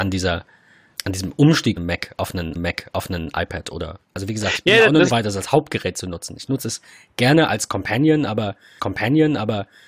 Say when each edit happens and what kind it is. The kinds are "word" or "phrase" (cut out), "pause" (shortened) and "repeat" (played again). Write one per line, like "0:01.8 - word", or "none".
0:01.0 - word
0:01.8 - phrase
0:02.5 - repeat
0:04.0 - pause
0:05.1 - word
0:08.8 - repeat

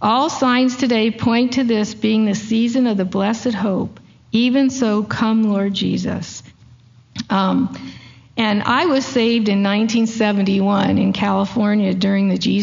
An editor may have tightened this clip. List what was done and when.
none

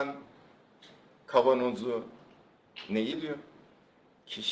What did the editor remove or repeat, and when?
0:03.1 - word

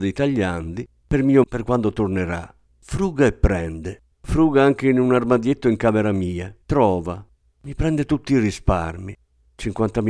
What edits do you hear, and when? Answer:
0:01.4 - word
0:02.7 - pause
0:04.1 - pause
0:06.6 - pause

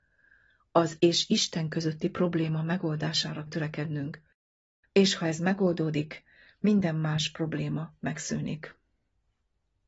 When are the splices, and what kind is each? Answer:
0:01.0 - word
0:03.5 - word

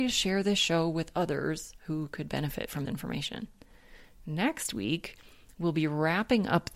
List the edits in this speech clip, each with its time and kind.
0:02.9 - word

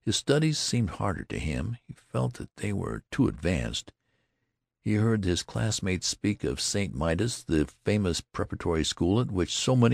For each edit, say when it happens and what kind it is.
none

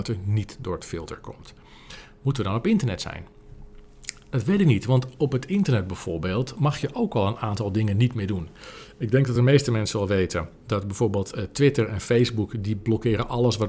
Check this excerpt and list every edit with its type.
none

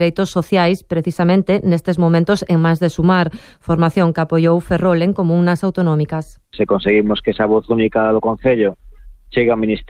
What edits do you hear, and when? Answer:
0:06.4 - pause

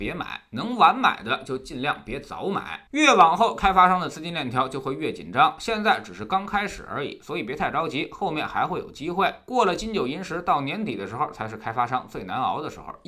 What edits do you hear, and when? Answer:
0:02.9 - pause

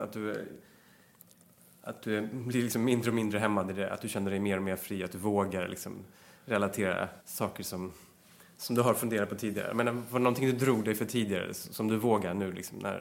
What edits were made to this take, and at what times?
0:07.2 - pause

